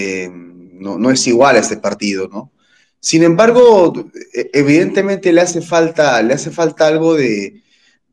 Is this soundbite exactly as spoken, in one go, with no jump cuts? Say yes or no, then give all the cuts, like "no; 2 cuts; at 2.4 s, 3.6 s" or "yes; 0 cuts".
yes; 0 cuts